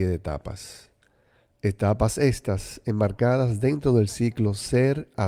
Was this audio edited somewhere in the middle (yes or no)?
no